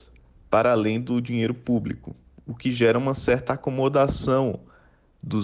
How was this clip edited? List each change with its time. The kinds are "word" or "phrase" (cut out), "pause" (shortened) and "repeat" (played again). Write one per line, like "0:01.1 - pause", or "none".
none